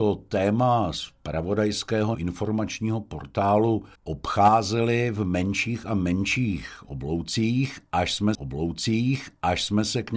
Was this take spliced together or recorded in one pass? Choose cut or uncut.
cut